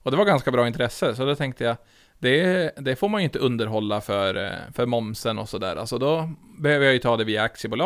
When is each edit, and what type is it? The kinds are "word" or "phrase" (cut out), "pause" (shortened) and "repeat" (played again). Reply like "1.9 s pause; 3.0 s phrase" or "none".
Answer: none